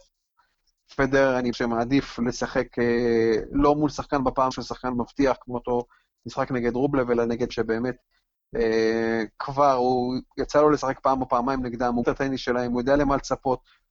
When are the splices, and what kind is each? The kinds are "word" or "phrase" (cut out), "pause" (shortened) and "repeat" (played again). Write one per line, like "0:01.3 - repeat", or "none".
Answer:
0:01.5 - word
0:04.5 - word
0:07.5 - word
0:12.0 - word

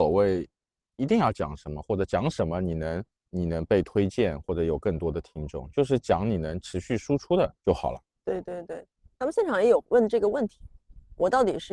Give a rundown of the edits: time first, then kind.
0:03.1 - pause
0:07.6 - pause

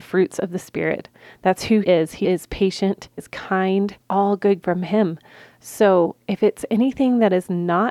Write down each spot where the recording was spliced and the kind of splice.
0:01.8 - word
0:02.2 - phrase
0:03.2 - word
0:04.0 - pause
0:04.6 - phrase

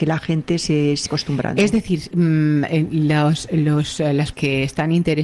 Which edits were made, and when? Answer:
0:01.1 - word
0:02.1 - word
0:04.3 - word

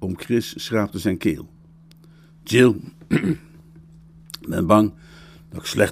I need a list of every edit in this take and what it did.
none

